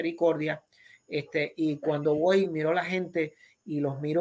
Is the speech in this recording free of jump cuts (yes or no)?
yes